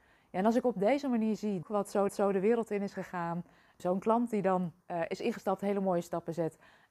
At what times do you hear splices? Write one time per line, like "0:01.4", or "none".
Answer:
0:01.6
0:02.1
0:03.8
0:04.8